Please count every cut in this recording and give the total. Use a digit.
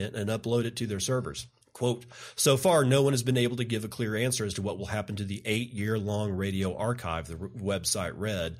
1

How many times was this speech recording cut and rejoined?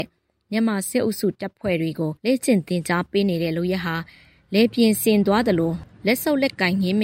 1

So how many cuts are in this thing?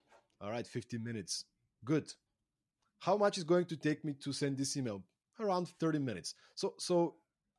0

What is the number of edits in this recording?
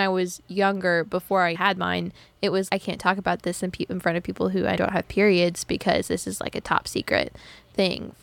3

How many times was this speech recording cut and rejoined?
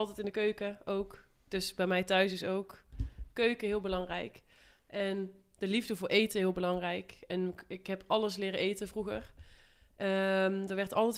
0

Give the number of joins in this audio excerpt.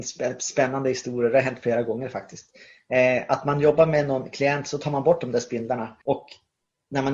1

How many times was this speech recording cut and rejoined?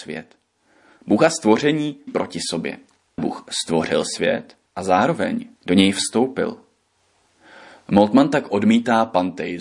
4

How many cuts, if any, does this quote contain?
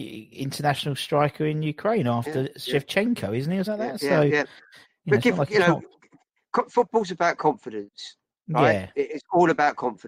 1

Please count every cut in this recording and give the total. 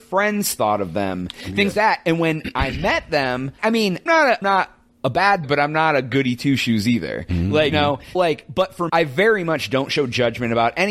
8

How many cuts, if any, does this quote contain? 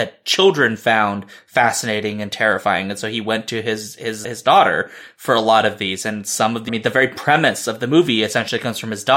2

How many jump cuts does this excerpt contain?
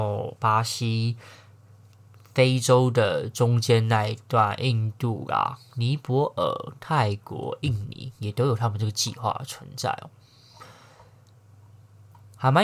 0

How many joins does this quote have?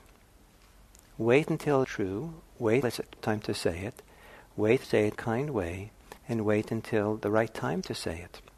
6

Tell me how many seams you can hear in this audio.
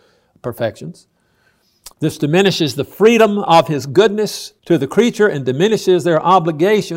2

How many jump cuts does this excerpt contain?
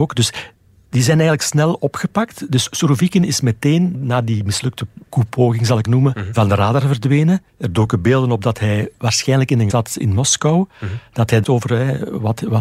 6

